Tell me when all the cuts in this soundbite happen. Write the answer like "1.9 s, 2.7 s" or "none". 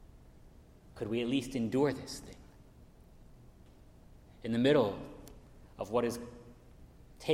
none